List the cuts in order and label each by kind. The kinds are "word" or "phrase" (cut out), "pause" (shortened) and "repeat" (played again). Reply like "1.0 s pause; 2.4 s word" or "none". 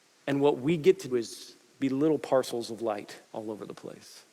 1.1 s word; 3.2 s pause